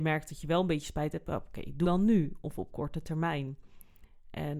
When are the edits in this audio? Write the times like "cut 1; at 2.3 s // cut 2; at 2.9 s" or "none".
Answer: cut 1; at 1.8 s